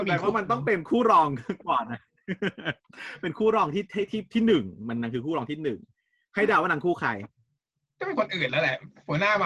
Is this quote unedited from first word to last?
yes; 0 cuts

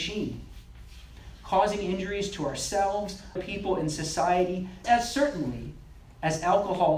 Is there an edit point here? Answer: yes; 2 cuts; at 3.4 s, 4.8 s

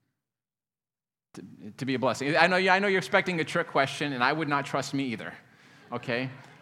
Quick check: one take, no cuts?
yes; 0 cuts

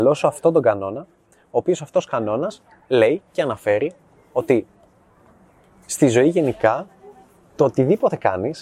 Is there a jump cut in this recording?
no; 0 cuts

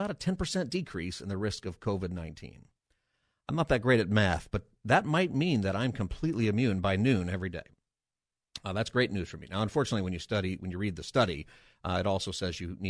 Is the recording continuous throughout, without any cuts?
yes; 0 cuts

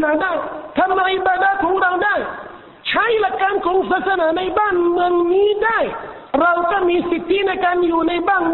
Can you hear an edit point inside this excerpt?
yes; 1 cut; at 6.3 s

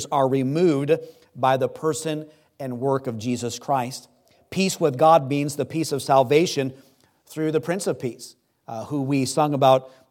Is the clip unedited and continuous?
yes; 0 cuts

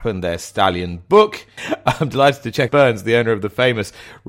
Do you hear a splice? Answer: yes; 1 cut; at 2.7 s

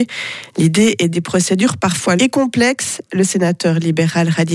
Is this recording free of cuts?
no; 2 cuts; at 1.1 s, 2.2 s

